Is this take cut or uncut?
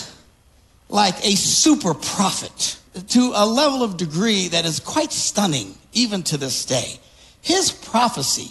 cut